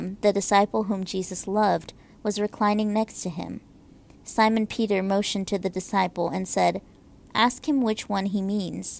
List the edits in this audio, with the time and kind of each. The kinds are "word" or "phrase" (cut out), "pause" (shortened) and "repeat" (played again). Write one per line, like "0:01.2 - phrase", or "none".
none